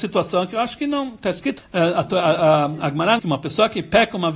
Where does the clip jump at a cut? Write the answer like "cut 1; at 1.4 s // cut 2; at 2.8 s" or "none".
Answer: cut 1; at 1.6 s // cut 2; at 3.2 s

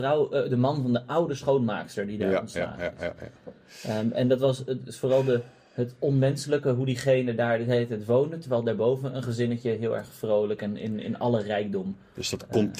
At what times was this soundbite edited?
none

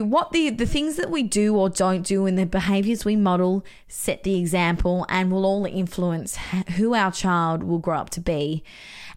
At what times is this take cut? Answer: none

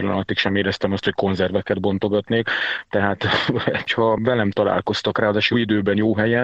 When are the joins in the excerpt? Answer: cut 1; at 5.5 s

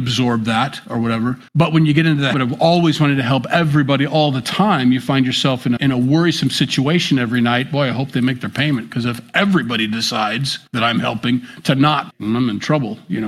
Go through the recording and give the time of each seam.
cut 1; at 1.5 s // cut 2; at 2.3 s // cut 3; at 5.8 s // cut 4; at 10.7 s // cut 5; at 12.1 s

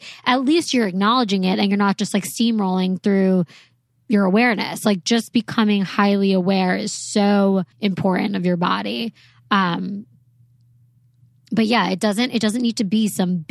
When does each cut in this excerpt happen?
cut 1; at 7.7 s

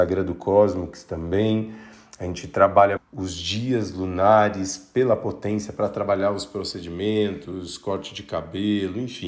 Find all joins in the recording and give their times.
cut 1; at 3.0 s

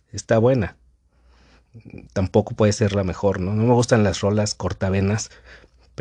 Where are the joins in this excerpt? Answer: cut 1; at 2.1 s

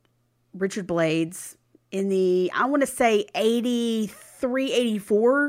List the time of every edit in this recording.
cut 1; at 1.7 s

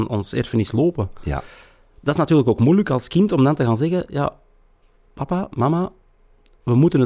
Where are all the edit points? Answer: none

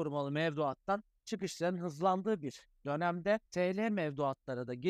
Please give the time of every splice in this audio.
cut 1; at 3.5 s

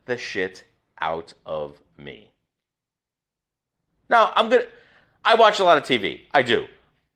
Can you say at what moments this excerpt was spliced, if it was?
none

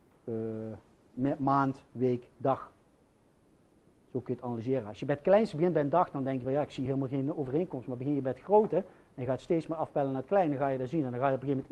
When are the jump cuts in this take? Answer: none

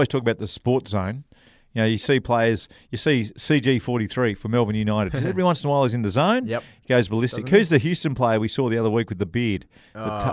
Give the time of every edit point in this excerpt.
none

